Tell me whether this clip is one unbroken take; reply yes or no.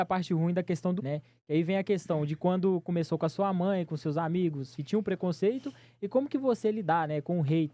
no